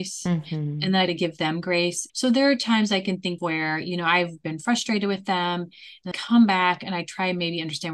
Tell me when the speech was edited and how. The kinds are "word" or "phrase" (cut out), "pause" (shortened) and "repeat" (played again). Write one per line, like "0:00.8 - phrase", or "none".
0:01.1 - word
0:02.1 - word
0:03.4 - word
0:06.1 - word

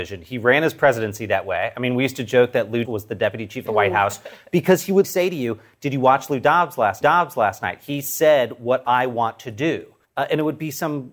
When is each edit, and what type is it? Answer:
0:02.8 - word
0:03.7 - phrase
0:05.0 - word
0:07.0 - repeat
0:10.0 - pause

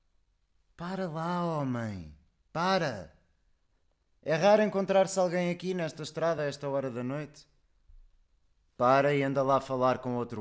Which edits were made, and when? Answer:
none

